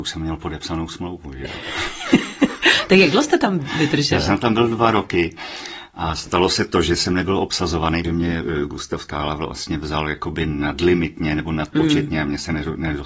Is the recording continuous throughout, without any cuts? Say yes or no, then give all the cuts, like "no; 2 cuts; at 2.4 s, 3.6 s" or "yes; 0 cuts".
no; 1 cut; at 8.0 s